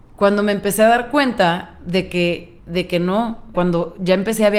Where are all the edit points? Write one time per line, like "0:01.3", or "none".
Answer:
0:02.6
0:03.5